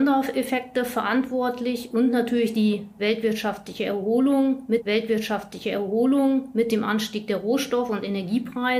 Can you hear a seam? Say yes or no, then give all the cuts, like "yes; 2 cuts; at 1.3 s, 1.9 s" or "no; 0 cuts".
yes; 1 cut; at 4.8 s